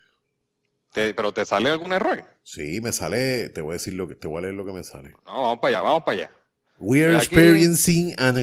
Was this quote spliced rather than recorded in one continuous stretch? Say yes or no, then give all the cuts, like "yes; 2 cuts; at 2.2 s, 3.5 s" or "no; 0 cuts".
no; 0 cuts